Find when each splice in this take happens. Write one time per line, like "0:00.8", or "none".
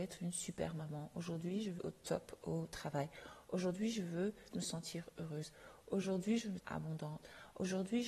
0:01.8
0:04.5
0:06.6